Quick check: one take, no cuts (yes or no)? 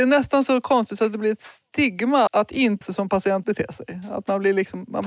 no